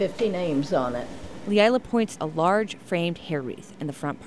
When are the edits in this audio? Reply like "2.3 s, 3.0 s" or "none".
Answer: 2.2 s